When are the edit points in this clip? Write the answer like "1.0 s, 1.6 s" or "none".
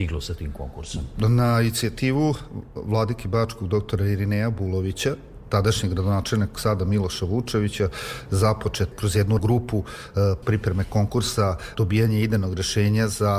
5.4 s, 6.5 s, 8.9 s, 9.4 s, 10.4 s, 11.7 s